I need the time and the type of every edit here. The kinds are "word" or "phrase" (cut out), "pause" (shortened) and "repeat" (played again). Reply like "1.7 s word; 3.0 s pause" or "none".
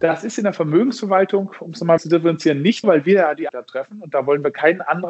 2.0 s word; 2.8 s word; 3.5 s word